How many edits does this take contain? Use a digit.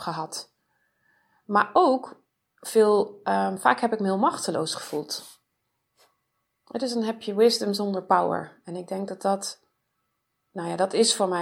0